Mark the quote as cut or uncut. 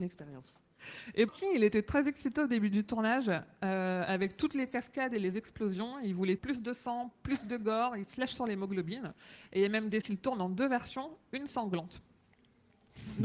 cut